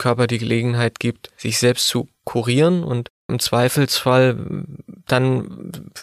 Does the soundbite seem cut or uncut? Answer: uncut